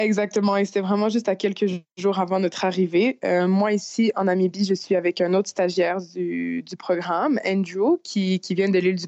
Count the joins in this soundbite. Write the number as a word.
zero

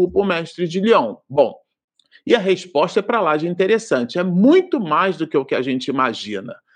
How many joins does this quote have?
zero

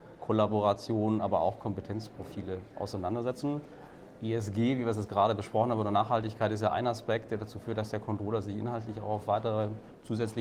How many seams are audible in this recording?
zero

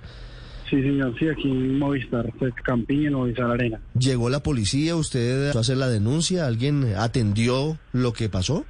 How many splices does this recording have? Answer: two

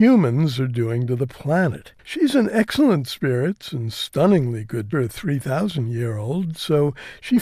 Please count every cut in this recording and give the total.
two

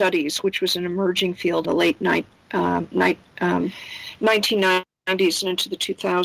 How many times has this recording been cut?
one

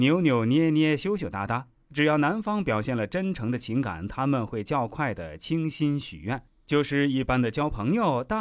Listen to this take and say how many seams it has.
zero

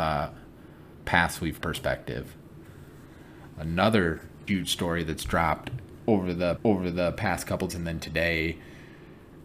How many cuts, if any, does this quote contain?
four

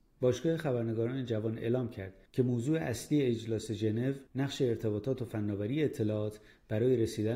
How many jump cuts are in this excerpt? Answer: one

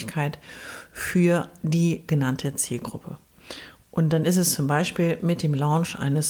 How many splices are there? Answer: zero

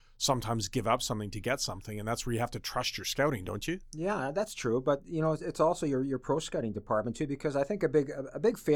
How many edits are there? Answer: zero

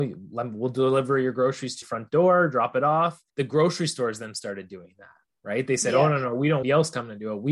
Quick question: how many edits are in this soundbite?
three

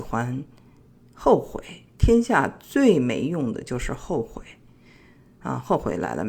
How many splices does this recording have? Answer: zero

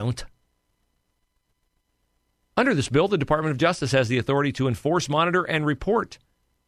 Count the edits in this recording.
zero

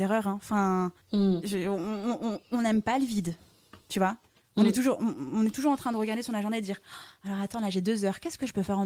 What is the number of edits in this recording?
two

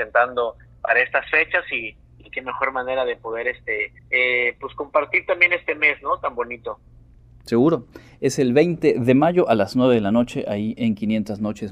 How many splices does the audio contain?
one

